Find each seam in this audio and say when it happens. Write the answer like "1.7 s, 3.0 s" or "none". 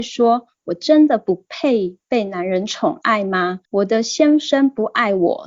3.6 s